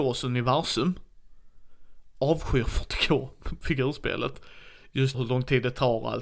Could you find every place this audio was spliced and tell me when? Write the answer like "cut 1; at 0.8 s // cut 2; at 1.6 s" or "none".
cut 1; at 5.1 s